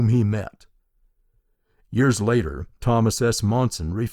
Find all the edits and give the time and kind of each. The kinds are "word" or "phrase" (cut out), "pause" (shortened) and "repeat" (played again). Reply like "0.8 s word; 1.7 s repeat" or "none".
2.8 s word